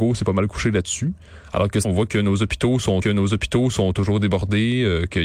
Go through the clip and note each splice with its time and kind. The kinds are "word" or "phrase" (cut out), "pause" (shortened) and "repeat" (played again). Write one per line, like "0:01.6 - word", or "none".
0:01.8 - word
0:03.0 - repeat